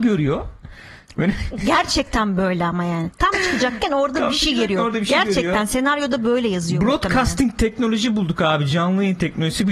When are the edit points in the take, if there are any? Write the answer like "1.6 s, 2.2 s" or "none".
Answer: none